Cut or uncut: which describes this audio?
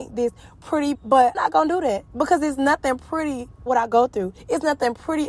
cut